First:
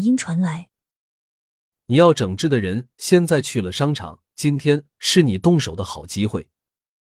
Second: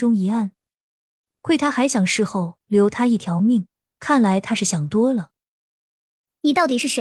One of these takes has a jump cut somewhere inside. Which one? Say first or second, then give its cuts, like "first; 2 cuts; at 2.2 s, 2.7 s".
first; 1 cut; at 4.3 s